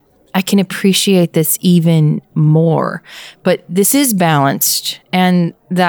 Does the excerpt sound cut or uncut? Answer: uncut